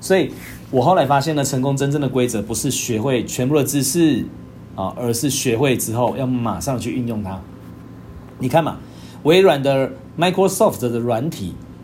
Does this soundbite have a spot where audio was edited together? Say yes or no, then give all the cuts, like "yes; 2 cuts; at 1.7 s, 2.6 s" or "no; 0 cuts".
no; 0 cuts